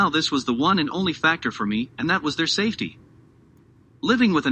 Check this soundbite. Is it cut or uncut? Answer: uncut